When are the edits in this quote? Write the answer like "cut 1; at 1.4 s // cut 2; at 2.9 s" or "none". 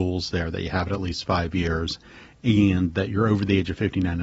none